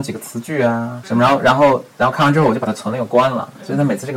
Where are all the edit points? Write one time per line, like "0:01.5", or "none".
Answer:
0:01.0